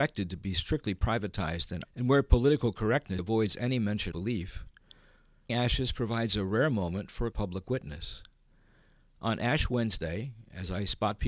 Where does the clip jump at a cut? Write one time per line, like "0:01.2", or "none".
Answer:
0:01.8
0:03.2
0:04.1
0:05.5
0:07.3